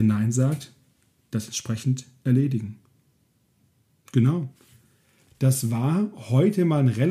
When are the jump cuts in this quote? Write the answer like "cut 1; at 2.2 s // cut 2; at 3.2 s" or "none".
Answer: none